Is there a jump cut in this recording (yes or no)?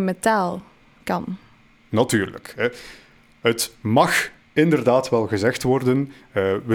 no